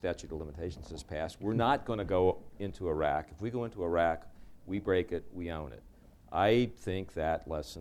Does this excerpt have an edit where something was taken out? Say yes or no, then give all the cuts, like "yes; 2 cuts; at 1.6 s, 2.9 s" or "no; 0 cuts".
no; 0 cuts